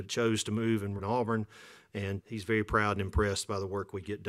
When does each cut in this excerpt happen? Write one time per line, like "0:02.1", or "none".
0:01.0
0:02.2